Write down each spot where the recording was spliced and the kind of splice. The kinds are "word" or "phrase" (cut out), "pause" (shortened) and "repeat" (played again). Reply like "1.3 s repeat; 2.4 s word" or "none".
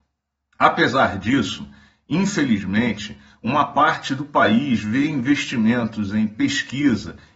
none